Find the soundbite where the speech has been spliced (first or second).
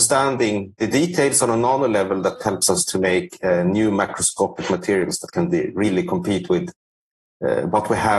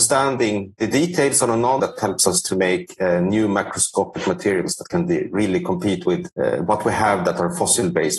second